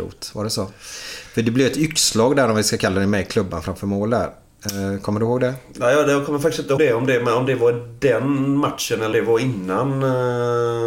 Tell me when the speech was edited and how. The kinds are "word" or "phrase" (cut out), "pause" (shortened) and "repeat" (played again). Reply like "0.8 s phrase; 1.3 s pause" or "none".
6.8 s word; 9.1 s word